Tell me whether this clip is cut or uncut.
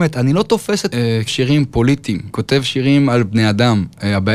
cut